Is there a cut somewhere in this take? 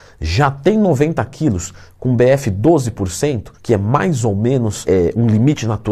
yes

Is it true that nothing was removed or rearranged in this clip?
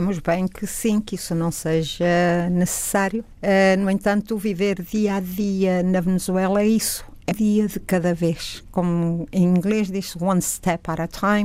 no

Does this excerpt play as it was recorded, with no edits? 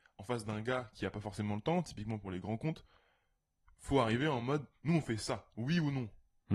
yes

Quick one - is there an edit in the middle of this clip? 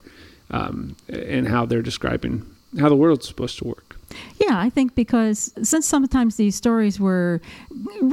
no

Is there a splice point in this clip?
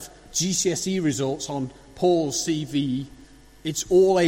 no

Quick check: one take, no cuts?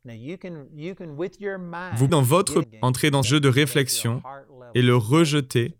no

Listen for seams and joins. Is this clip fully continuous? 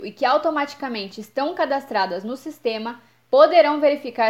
yes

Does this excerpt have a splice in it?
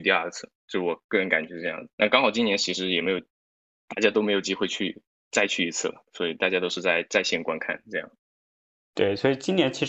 yes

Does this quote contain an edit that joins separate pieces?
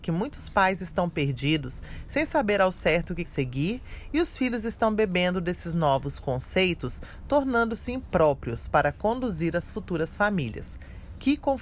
yes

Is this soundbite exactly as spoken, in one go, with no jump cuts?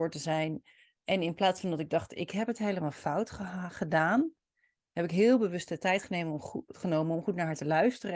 yes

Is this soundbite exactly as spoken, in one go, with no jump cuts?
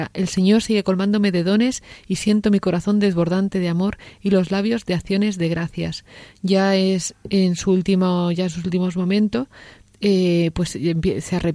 yes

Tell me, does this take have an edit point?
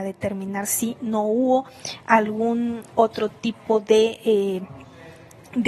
no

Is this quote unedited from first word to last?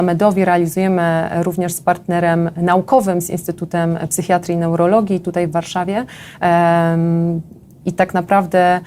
yes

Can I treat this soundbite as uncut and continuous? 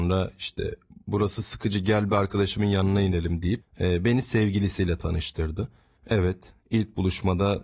yes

